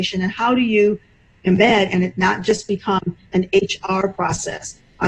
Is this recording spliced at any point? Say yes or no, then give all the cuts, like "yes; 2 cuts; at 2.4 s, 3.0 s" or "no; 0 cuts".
no; 0 cuts